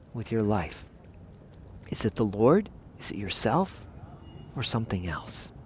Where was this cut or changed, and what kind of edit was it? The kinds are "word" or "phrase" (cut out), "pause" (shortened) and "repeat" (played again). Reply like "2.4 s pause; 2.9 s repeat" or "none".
2.9 s pause